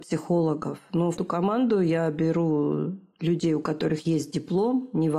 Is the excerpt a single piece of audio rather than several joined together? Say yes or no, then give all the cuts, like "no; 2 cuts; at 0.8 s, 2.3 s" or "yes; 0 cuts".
no; 1 cut; at 1.2 s